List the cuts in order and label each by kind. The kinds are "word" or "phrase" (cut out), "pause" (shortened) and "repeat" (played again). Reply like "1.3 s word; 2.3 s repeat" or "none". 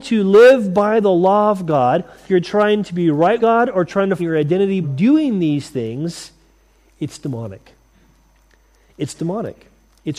2.3 s word; 3.4 s word; 4.2 s word; 4.8 s word

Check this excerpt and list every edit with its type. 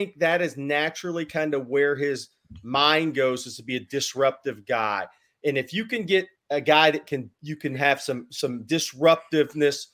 none

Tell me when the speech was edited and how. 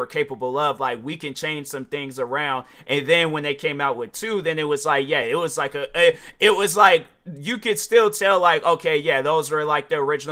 none

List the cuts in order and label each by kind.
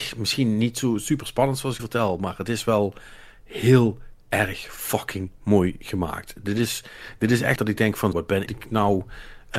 1.8 s phrase; 7.6 s phrase; 8.1 s word; 8.5 s phrase

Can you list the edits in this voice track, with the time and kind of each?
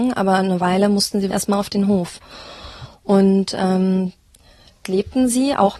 1.3 s word; 4.8 s word

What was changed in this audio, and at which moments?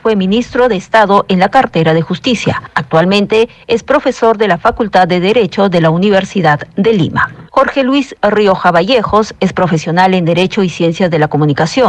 7.5 s pause

